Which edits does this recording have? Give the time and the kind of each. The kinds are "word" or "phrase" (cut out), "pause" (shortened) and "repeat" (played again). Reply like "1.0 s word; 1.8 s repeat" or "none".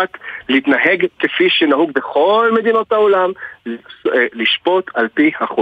none